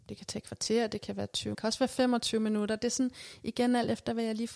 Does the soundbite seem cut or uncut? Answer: cut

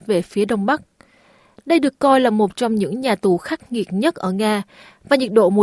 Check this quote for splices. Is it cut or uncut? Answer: uncut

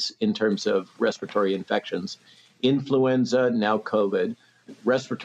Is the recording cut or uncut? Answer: uncut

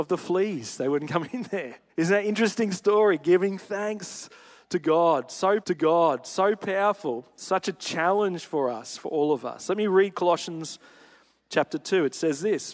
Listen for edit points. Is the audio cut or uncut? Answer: cut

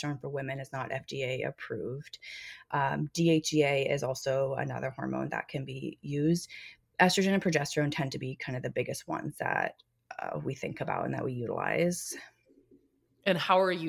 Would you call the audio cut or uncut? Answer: uncut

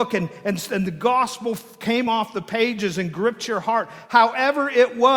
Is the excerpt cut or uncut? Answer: uncut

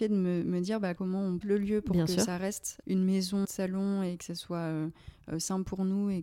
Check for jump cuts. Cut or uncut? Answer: cut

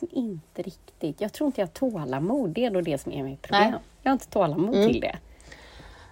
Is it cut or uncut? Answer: uncut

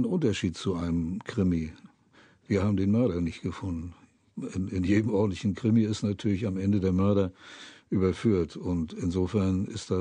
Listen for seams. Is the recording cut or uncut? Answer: uncut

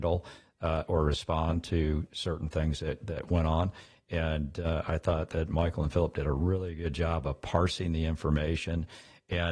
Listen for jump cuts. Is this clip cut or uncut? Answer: uncut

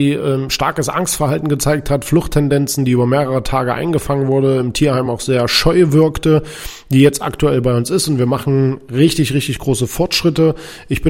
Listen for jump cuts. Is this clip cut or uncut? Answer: uncut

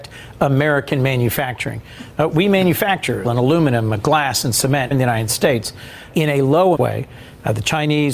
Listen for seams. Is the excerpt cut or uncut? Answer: cut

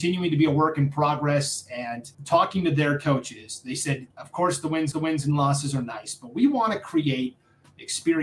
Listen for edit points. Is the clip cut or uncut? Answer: cut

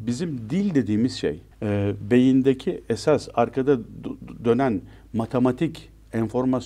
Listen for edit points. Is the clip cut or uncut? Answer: cut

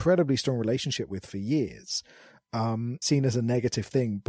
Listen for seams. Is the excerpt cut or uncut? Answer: cut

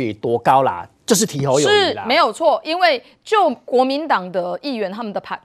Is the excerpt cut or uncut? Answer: uncut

